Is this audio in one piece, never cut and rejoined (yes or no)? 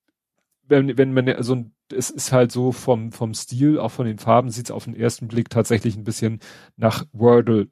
yes